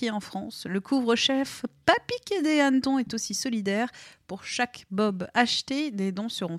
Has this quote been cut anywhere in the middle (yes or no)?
no